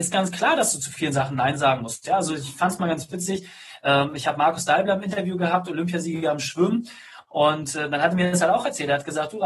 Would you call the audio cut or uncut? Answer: uncut